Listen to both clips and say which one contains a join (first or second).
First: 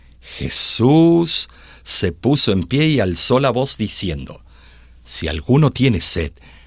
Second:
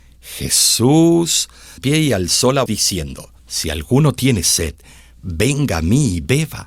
second